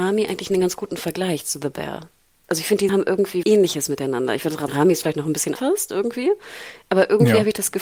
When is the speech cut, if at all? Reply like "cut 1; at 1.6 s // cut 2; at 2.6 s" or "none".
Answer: cut 1; at 2.9 s // cut 2; at 3.4 s // cut 3; at 4.7 s // cut 4; at 5.6 s